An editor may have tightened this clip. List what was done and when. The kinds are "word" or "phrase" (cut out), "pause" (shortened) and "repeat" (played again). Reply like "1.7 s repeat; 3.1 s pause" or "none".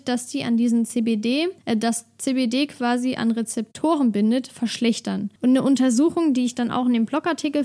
1.6 s pause; 5.4 s pause